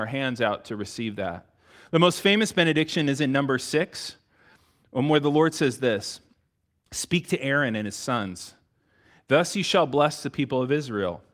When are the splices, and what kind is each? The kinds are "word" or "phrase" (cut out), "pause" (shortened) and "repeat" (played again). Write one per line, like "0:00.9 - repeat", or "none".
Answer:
none